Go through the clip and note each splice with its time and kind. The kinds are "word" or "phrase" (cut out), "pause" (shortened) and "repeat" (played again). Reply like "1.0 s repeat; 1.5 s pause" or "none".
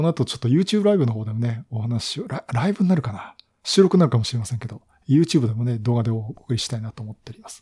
none